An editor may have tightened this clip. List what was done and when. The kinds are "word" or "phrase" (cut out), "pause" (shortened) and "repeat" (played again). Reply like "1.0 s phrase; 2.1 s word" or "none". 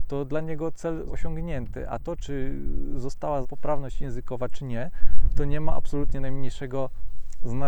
1.1 s word; 3.4 s word